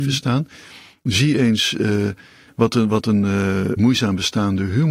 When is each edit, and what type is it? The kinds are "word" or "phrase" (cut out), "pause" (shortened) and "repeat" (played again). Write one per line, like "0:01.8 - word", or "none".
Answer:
0:03.8 - word